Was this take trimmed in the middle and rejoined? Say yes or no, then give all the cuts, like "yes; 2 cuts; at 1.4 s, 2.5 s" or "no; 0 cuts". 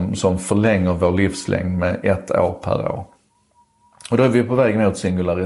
no; 0 cuts